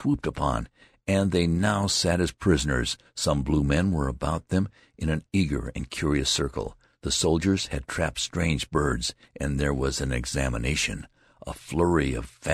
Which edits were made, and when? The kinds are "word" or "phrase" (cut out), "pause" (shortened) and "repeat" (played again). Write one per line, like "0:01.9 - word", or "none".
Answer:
none